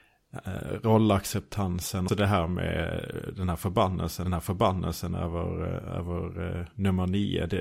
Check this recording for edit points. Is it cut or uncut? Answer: cut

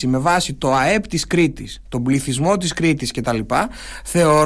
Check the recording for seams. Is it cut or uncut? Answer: uncut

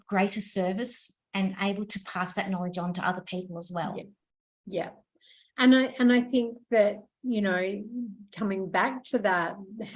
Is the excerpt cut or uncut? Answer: uncut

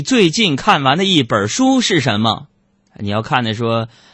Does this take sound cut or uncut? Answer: cut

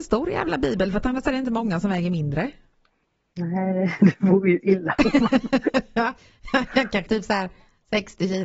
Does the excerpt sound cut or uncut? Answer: cut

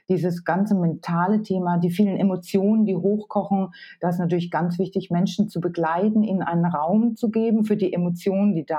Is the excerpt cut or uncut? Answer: uncut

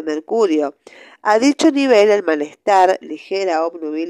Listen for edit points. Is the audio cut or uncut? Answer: uncut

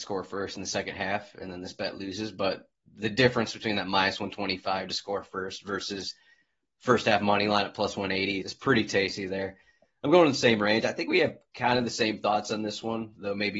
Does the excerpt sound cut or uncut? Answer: cut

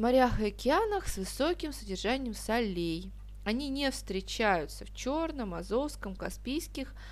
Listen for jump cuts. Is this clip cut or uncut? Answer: uncut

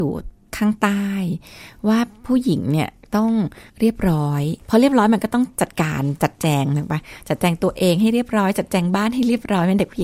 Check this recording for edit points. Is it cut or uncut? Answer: cut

